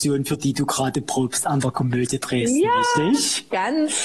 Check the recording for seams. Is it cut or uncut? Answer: uncut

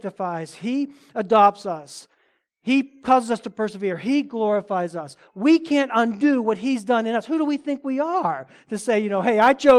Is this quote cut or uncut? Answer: uncut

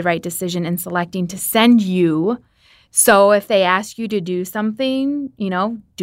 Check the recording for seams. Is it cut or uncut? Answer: uncut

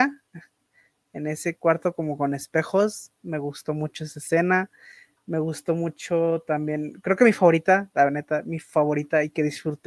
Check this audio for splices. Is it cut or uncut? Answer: uncut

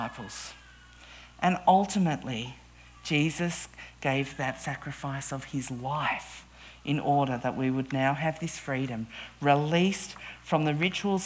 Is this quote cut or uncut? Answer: uncut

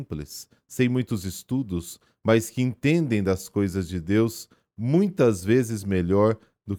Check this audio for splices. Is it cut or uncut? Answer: uncut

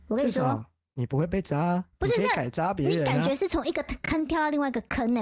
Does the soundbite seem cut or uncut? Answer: cut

